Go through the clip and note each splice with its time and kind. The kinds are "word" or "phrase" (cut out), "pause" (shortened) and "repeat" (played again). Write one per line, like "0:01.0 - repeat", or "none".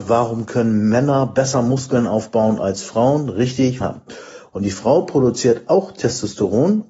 0:03.8 - phrase